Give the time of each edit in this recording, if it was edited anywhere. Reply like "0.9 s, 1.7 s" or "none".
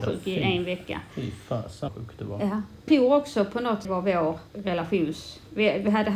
1.9 s, 2.9 s, 3.8 s, 4.5 s